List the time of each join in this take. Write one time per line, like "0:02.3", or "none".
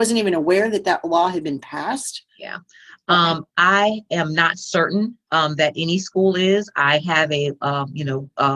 0:02.3
0:03.5